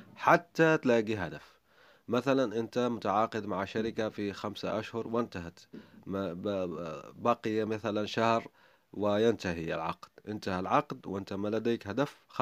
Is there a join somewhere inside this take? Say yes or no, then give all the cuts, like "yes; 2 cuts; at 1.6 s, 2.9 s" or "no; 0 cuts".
no; 0 cuts